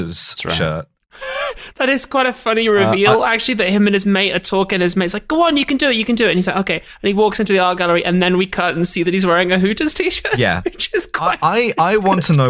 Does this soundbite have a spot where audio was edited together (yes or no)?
no